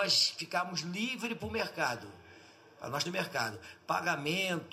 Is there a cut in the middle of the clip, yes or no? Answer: yes